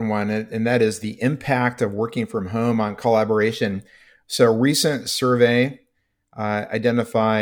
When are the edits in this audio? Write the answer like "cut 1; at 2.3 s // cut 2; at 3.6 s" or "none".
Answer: none